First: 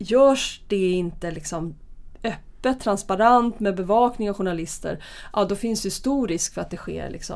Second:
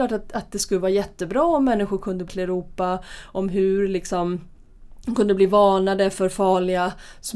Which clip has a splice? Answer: second; 1 cut; at 2.3 s

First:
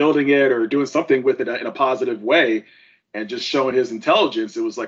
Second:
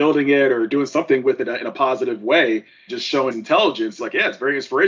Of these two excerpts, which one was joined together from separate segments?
second; 3 cuts; at 2.9 s, 3.3 s, 4.0 s

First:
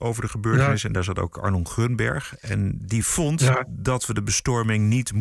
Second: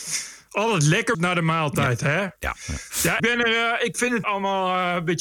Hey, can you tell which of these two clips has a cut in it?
second; 3 cuts; at 1.1 s, 3.2 s, 4.2 s

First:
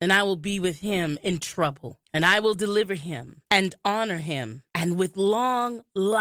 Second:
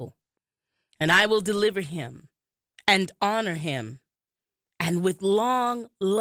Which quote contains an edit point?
first; 3 cuts; at 2.0 s, 3.5 s, 4.7 s

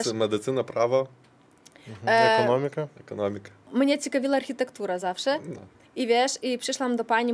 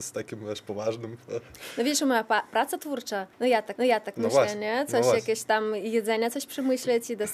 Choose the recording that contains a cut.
second; 2 cuts; at 3.3 s, 3.8 s

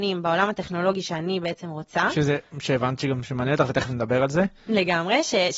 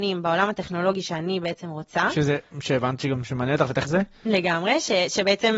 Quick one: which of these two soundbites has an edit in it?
second; 1 cut; at 3.9 s

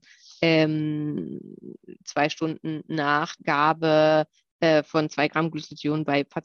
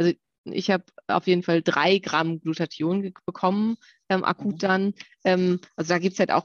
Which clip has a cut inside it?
first; 1 cut; at 3.4 s

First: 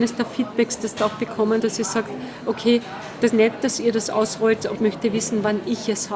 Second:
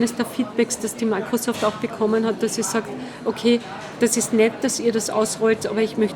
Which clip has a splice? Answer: first; 4 cuts; at 1.0 s, 1.6 s, 3.3 s, 4.7 s

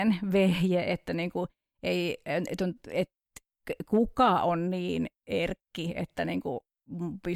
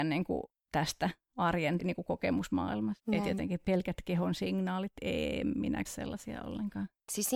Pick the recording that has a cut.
second; 4 cuts; at 1.8 s, 3.0 s, 3.6 s, 5.9 s

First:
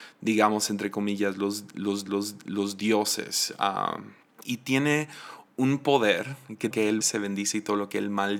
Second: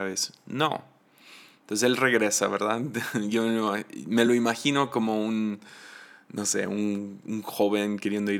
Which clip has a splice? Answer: first; 5 cuts; at 2.1 s, 4.2 s, 5.5 s, 6.7 s, 7.0 s

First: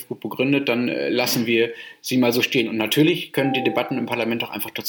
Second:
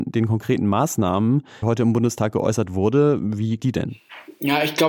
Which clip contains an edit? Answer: second; 2 cuts; at 1.6 s, 3.6 s

